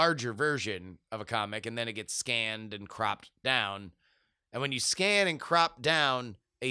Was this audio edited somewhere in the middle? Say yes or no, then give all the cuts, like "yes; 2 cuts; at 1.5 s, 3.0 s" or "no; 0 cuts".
no; 0 cuts